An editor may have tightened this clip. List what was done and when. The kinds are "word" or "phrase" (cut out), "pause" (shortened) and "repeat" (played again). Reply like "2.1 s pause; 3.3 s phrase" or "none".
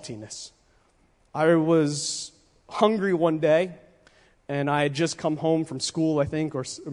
none